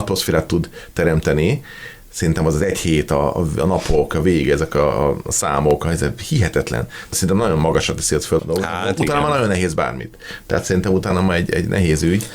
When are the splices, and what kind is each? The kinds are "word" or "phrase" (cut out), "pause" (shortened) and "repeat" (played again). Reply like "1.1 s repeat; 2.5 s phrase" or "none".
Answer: 8.4 s word